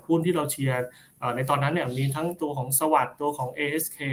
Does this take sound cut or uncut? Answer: uncut